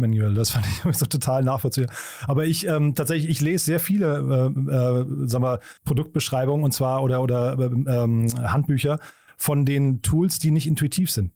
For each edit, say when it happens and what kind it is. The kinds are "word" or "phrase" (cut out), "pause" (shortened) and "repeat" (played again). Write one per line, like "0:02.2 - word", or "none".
0:05.8 - pause